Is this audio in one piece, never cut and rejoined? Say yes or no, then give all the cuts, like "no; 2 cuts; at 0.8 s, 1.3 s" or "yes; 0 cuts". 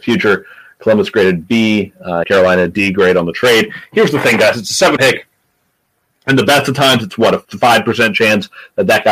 no; 3 cuts; at 2.2 s, 5.0 s, 7.4 s